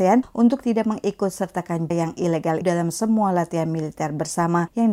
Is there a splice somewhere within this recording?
yes; 2 cuts; at 1.9 s, 2.6 s

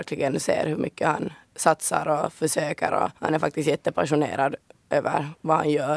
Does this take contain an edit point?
yes; 1 cut; at 3.2 s

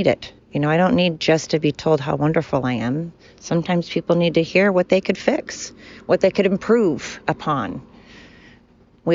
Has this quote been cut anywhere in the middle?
no; 0 cuts

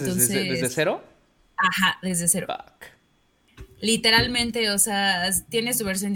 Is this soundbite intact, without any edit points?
yes; 0 cuts

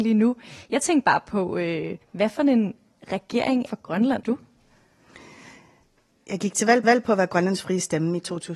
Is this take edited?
yes; 4 cuts; at 2.0 s, 3.7 s, 4.2 s, 6.8 s

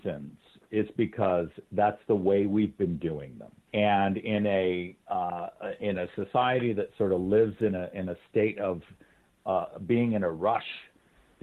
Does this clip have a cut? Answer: no; 0 cuts

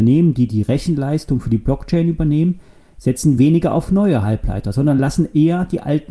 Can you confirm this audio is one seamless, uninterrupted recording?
yes; 0 cuts

